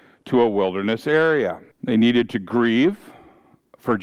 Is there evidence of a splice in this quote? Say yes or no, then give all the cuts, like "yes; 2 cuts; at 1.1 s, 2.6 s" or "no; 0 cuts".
yes; 1 cut; at 1.7 s